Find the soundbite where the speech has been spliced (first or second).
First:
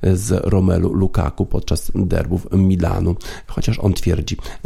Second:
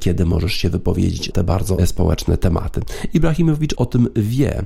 second